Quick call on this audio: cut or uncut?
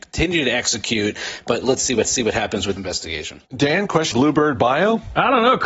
cut